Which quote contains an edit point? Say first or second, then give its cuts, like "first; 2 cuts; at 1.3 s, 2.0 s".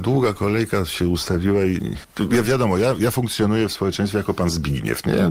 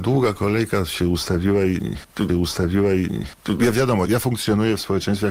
second; 2 cuts; at 2.3 s, 4.0 s